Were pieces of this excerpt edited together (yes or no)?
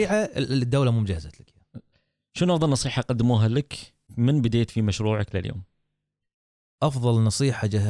no